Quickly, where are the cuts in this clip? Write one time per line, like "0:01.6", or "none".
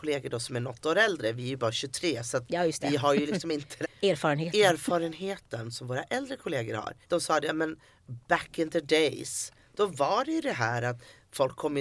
0:03.8
0:07.0

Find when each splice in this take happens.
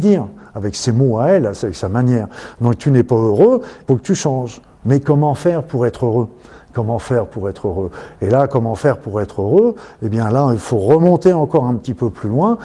0:03.9

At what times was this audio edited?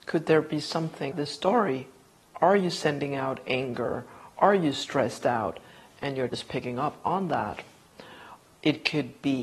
0:01.1
0:06.3

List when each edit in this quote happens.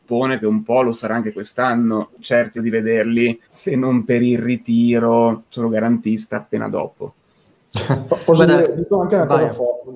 0:02.1
0:02.5
0:03.4
0:05.5

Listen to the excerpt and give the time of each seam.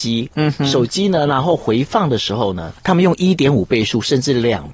0:02.8

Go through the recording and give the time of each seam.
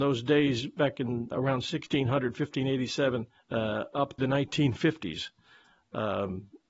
0:01.3
0:03.4
0:04.2

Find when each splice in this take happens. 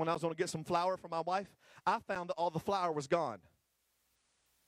none

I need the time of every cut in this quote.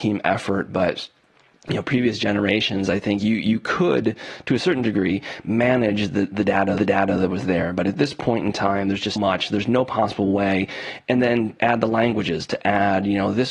0:06.8
0:09.2
0:11.6

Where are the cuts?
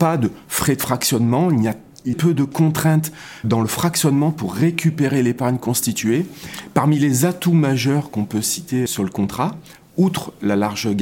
0:02.1
0:03.4
0:08.9

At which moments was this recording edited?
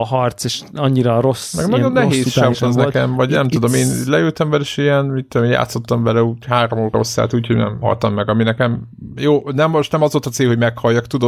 0:02.5
0:07.8

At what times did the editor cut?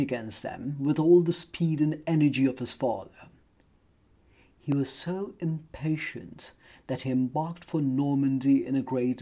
none

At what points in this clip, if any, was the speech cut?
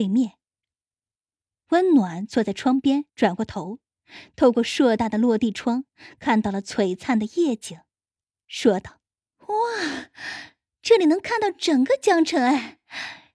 0:03.1
0:09.1

